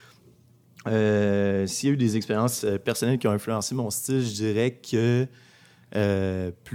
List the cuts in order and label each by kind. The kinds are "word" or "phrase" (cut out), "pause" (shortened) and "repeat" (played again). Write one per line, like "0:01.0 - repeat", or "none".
none